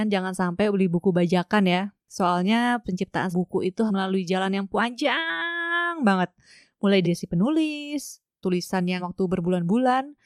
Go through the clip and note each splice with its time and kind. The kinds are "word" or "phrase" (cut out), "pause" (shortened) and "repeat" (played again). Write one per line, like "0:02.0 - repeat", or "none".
0:02.8 - word
0:03.3 - word
0:03.9 - word
0:07.0 - word
0:08.4 - word
0:09.0 - word

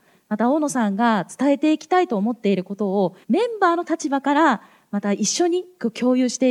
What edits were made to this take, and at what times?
0:03.2 - pause

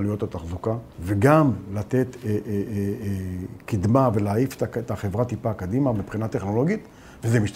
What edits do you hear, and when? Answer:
0:00.9 - pause

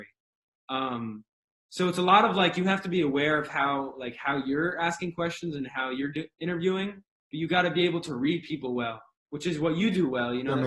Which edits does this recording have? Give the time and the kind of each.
0:06.3 - pause

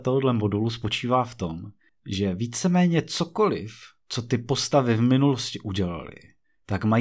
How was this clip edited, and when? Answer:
none

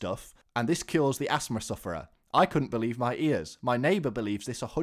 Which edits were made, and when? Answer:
none

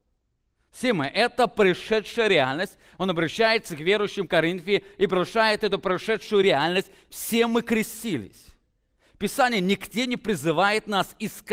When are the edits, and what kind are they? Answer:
none

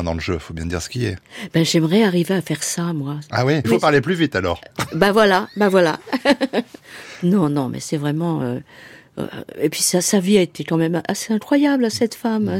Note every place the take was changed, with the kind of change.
0:03.6 - phrase

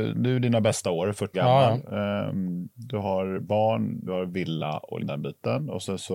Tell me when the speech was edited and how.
0:01.3 - word
0:04.1 - word
0:05.0 - word

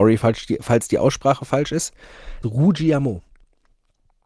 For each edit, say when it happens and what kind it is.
0:02.4 - word

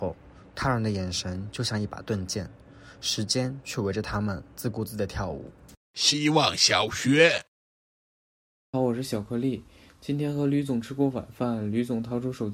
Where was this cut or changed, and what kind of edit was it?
0:05.8 - pause
0:08.7 - phrase

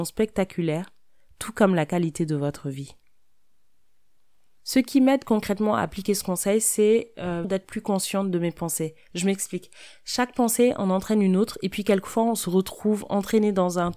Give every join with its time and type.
0:07.4 - word

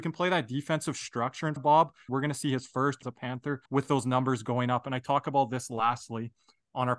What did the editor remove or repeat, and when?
0:01.6 - word
0:02.1 - phrase
0:03.0 - phrase
0:03.7 - pause

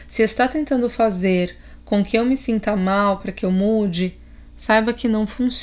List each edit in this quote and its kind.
none

